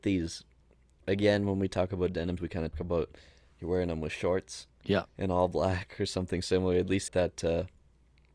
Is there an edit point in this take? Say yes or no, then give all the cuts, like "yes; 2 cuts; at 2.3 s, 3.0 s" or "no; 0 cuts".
yes; 4 cuts; at 2.4 s, 2.7 s, 5.1 s, 7.1 s